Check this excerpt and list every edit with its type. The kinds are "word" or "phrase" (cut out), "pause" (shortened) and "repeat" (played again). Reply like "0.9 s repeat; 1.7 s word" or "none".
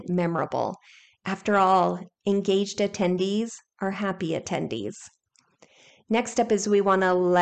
none